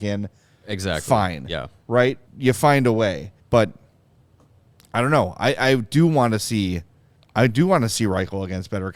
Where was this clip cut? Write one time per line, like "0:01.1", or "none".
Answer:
0:02.3
0:03.4
0:07.2